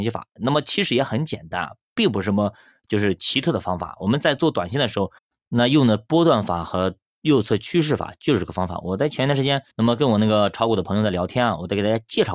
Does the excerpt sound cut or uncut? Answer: cut